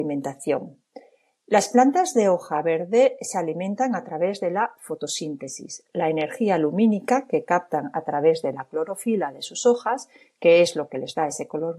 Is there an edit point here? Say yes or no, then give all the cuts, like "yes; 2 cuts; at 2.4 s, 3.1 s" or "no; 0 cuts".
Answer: no; 0 cuts